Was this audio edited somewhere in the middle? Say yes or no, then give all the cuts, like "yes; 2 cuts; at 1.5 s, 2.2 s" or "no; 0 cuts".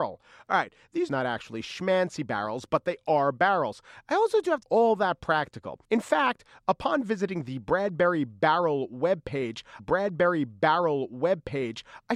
yes; 4 cuts; at 1.1 s, 4.6 s, 5.8 s, 9.8 s